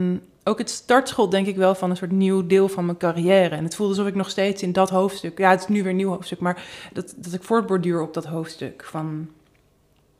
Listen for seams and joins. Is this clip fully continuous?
yes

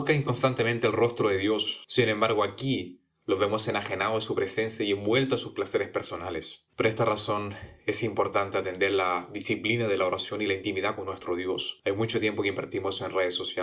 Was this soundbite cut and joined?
yes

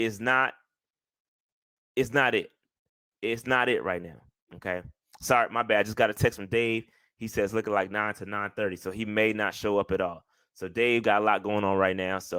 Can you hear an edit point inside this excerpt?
no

